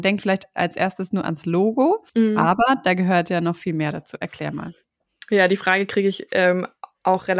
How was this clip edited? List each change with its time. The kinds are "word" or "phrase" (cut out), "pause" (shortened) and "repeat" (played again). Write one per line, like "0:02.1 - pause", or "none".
0:02.1 - pause